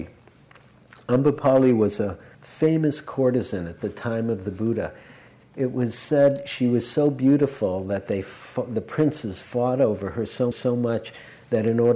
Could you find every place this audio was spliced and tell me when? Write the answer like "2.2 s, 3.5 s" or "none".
2.3 s, 10.5 s